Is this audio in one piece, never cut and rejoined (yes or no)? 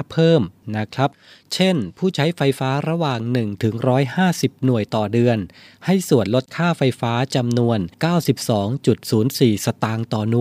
no